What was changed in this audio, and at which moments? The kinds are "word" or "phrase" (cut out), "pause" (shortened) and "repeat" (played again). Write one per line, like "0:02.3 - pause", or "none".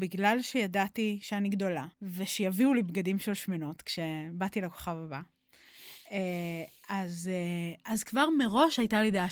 0:01.9 - pause